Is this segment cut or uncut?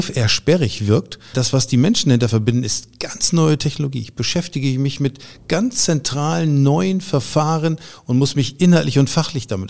cut